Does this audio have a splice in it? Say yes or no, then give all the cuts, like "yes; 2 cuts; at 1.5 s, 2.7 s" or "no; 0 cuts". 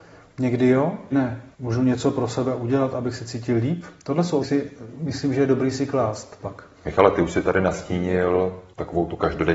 yes; 5 cuts; at 1.1 s, 1.5 s, 4.4 s, 6.4 s, 6.7 s